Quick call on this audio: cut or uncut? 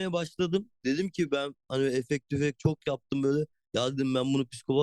uncut